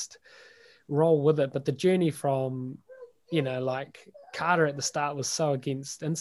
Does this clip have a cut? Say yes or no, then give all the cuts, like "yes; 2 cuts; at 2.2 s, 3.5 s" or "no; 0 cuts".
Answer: no; 0 cuts